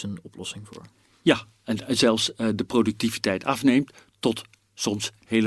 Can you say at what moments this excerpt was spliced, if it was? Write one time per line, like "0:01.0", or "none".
none